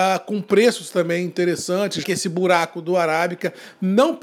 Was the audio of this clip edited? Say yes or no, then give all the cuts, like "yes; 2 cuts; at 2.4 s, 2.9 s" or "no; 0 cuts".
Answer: yes; 1 cut; at 2.0 s